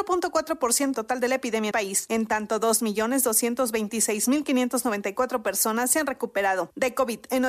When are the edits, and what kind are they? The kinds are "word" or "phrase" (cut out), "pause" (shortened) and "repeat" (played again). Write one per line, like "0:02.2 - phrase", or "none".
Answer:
0:00.9 - word
0:01.7 - phrase